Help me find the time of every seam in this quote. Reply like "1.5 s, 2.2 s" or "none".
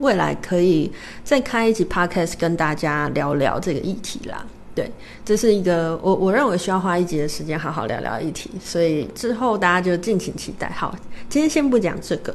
none